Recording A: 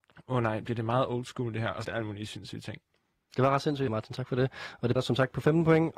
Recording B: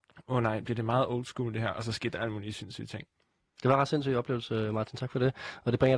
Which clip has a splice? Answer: A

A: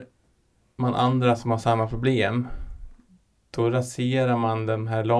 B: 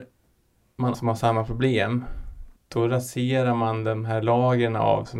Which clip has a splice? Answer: B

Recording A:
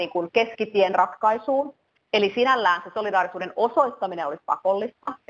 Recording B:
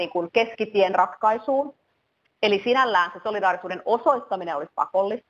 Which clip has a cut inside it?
A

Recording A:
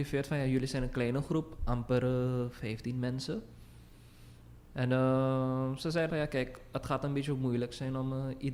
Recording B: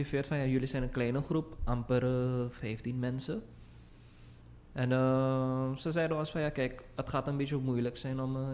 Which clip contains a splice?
A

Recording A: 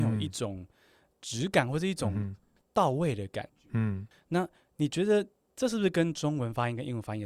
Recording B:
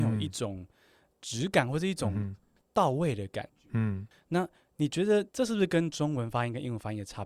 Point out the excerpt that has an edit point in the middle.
B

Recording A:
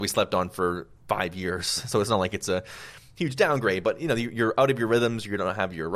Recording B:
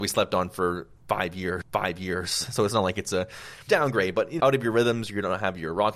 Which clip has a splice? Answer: B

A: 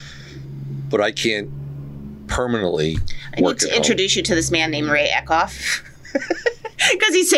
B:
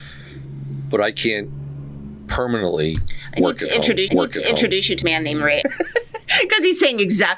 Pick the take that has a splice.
B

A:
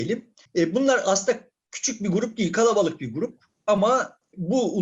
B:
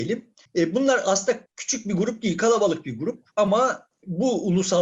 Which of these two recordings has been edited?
B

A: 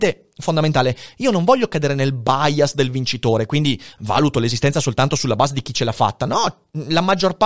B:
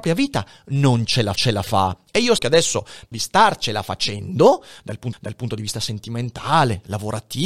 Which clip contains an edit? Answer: B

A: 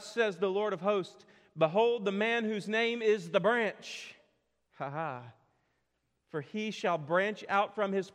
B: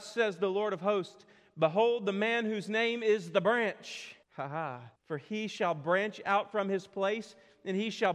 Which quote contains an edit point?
B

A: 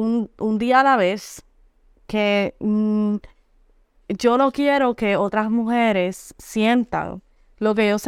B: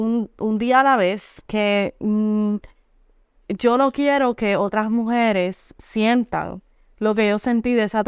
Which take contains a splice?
B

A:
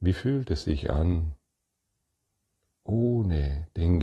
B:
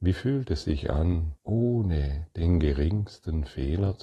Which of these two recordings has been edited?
B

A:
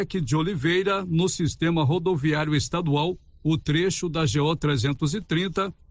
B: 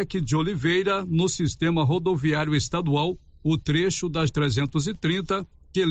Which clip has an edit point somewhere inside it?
B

